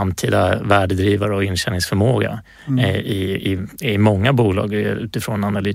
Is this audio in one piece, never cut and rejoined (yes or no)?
yes